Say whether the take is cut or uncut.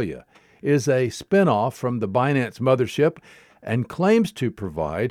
uncut